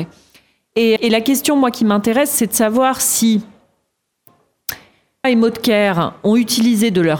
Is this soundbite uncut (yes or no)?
no